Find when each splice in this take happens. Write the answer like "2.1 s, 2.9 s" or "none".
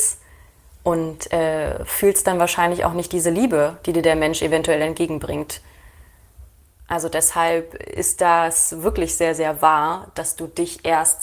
none